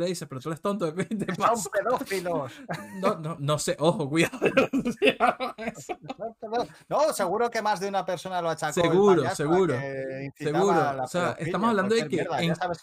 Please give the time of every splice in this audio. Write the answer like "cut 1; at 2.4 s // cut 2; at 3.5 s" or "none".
cut 1; at 3.4 s